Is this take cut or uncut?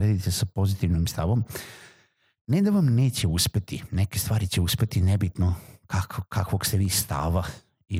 uncut